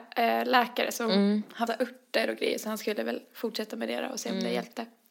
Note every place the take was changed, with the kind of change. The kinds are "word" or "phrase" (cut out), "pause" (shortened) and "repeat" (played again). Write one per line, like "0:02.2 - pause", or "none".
0:01.7 - phrase